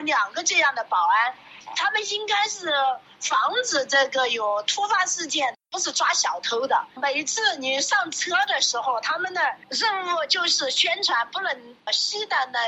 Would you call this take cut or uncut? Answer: uncut